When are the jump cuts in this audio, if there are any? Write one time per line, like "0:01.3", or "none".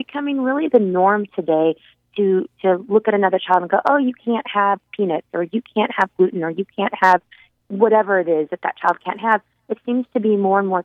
none